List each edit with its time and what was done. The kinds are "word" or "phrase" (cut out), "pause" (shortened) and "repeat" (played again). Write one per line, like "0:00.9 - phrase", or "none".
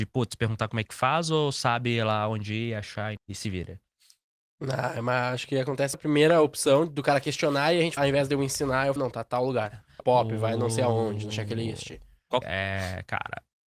0:03.2 - word
0:05.9 - word
0:08.0 - word
0:09.0 - word
0:10.0 - word
0:12.4 - word